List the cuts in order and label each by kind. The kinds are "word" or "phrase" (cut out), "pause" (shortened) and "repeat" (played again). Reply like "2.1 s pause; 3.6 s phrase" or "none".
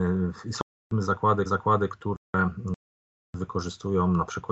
1.5 s repeat